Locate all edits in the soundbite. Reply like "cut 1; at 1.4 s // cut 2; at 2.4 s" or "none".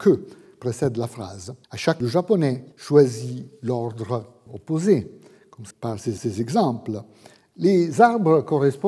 cut 1; at 1.6 s // cut 2; at 2.0 s // cut 3; at 2.7 s // cut 4; at 4.5 s // cut 5; at 5.7 s // cut 6; at 6.2 s

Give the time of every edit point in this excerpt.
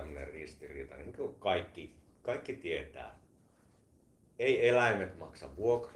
none

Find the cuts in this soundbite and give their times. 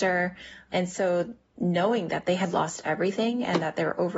none

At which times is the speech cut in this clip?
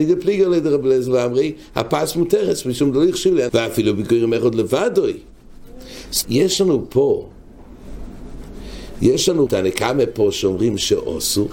cut 1; at 3.5 s // cut 2; at 6.2 s // cut 3; at 9.5 s

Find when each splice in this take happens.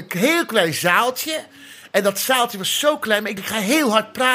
cut 1; at 3.4 s

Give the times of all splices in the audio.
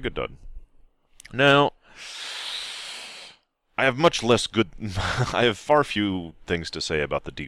cut 1; at 6.4 s

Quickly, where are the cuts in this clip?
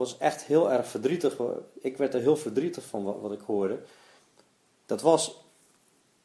none

